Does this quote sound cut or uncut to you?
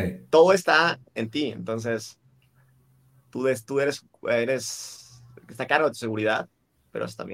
uncut